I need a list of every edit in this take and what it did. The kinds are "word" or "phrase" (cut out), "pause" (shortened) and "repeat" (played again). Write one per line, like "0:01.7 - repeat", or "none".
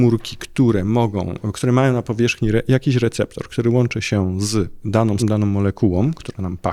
0:05.2 - word